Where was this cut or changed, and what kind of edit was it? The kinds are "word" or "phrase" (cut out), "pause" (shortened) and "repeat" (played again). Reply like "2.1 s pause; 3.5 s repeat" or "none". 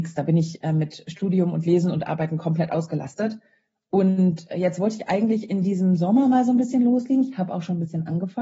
none